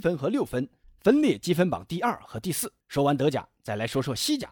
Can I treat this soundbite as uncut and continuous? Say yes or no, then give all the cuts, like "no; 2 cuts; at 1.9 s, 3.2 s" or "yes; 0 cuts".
no; 1 cut; at 2.8 s